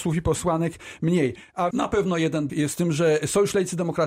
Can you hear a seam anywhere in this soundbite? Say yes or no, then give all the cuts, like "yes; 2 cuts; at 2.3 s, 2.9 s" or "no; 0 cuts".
yes; 2 cuts; at 1.7 s, 2.5 s